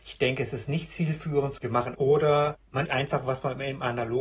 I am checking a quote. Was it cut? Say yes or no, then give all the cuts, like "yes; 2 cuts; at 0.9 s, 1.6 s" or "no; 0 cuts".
yes; 3 cuts; at 1.6 s, 1.9 s, 2.9 s